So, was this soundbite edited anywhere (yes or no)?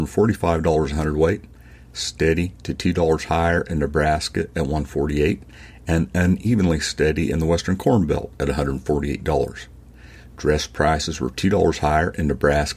no